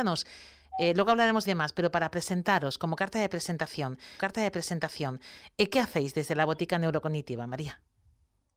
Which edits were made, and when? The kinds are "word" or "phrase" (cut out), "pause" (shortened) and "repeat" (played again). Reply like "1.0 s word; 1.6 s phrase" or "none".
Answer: 1.4 s phrase; 4.2 s repeat